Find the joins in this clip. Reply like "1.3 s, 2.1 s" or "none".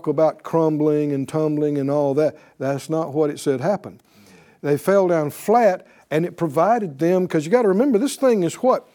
none